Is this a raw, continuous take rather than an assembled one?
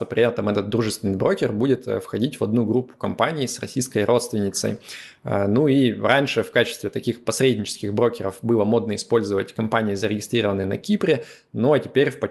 yes; 0 cuts

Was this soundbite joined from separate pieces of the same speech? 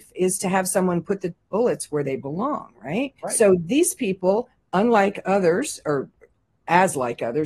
yes; 1 cut; at 3.2 s

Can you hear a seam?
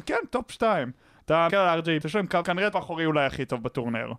yes; 4 cuts; at 1.5 s, 2.0 s, 2.4 s, 2.7 s

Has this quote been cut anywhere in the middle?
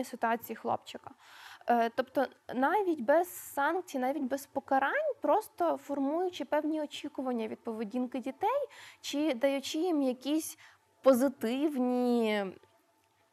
no; 0 cuts

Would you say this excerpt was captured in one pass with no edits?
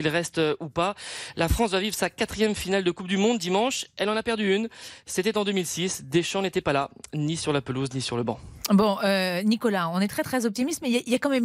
yes; 0 cuts

